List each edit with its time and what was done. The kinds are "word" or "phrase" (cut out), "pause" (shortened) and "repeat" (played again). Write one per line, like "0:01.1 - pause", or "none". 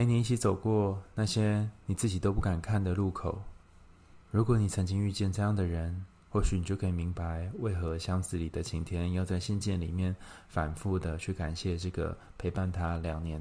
0:04.2 - pause